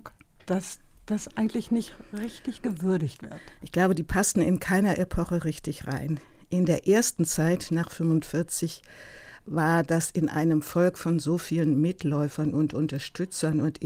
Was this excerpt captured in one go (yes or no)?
yes